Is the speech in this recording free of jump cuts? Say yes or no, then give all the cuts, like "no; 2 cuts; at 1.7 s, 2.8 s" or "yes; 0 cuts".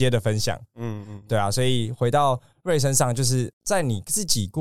yes; 0 cuts